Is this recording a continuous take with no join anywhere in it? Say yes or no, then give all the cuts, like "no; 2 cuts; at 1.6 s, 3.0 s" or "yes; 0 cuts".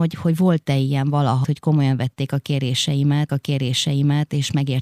no; 2 cuts; at 1.4 s, 3.3 s